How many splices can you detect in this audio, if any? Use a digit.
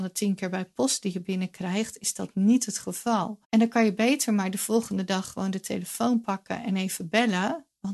1